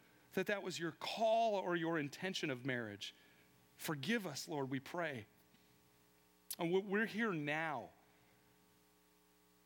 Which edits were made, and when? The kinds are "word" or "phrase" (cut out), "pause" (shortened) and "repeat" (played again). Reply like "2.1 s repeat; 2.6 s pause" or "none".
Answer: none